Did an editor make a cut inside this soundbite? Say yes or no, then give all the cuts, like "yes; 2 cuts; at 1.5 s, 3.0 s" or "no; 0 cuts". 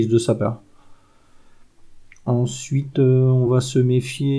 no; 0 cuts